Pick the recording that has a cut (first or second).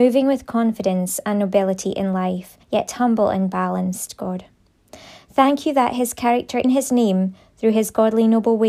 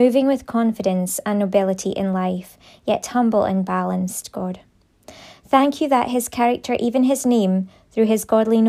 first